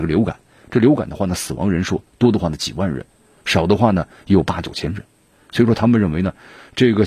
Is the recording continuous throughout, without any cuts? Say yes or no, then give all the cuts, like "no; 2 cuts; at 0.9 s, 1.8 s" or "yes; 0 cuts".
yes; 0 cuts